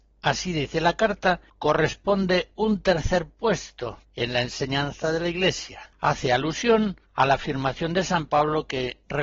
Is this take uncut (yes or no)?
no